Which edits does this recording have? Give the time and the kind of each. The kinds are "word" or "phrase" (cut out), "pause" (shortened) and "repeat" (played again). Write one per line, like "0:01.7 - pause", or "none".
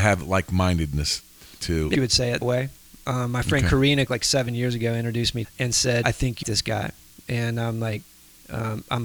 0:01.9 - phrase
0:02.4 - word
0:04.1 - word
0:05.4 - phrase
0:06.0 - word
0:06.4 - phrase